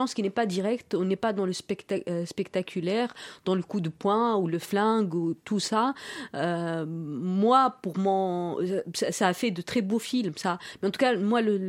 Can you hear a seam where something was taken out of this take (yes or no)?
no